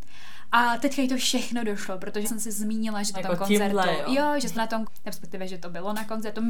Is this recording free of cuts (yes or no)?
no